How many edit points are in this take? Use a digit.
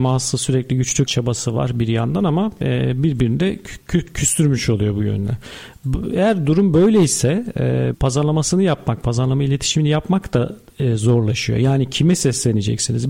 2